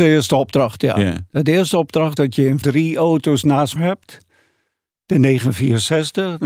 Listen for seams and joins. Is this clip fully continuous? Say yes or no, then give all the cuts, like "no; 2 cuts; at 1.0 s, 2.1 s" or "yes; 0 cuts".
no; 3 cuts; at 2.2 s, 2.6 s, 3.8 s